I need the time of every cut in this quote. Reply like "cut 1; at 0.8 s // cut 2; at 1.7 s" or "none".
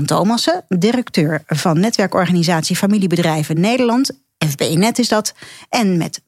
none